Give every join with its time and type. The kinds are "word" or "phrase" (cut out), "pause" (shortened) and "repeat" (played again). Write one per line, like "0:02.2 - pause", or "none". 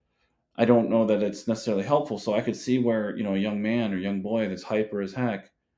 none